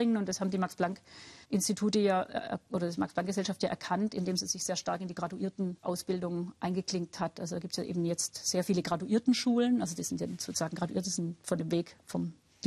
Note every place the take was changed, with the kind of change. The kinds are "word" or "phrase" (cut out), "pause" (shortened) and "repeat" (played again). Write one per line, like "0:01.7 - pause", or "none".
0:01.4 - pause
0:05.8 - word